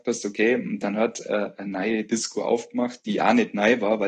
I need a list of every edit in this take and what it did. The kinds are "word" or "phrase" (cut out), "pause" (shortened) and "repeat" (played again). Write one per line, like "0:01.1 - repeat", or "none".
none